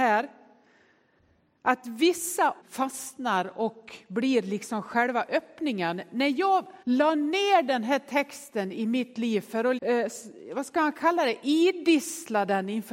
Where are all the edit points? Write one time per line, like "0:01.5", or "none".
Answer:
0:02.6
0:06.8
0:09.8